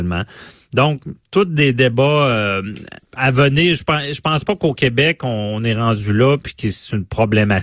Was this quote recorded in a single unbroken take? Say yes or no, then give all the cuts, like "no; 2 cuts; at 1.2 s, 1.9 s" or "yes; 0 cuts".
no; 1 cut; at 3.0 s